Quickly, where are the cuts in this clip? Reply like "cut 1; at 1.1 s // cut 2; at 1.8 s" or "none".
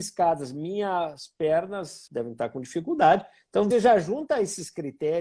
cut 1; at 2.1 s // cut 2; at 3.7 s